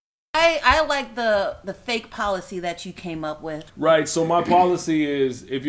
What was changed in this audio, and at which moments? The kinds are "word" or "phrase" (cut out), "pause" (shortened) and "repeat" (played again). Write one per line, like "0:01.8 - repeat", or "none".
0:03.7 - pause